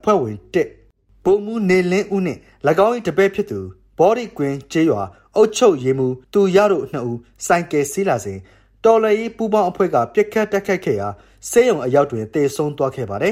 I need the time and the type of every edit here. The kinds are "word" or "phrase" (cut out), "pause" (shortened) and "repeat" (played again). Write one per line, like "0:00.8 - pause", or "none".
0:06.2 - pause

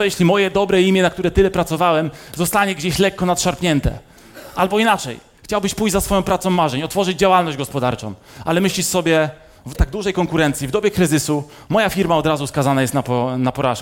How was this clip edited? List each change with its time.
0:09.7 - word

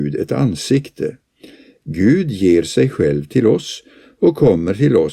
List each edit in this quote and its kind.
none

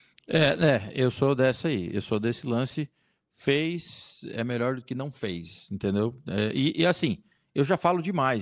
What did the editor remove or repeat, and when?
none

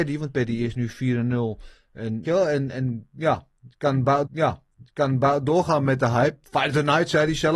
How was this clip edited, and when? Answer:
0:02.2 - word
0:04.3 - repeat

